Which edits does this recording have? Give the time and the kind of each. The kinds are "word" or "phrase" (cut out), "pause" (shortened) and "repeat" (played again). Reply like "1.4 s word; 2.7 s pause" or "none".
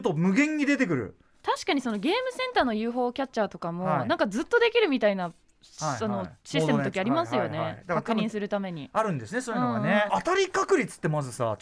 10.1 s phrase